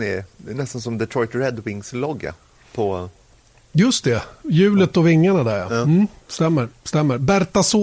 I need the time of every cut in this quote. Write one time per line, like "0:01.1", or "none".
none